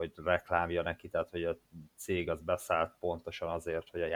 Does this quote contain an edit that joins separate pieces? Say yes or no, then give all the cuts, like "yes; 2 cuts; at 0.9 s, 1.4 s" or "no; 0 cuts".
no; 0 cuts